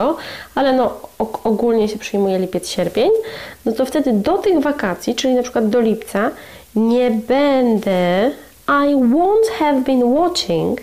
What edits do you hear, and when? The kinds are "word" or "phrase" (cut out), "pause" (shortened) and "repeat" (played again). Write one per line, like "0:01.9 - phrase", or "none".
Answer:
none